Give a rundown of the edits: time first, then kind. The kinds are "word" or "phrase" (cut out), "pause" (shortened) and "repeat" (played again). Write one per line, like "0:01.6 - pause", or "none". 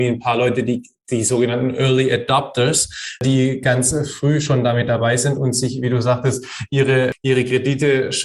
none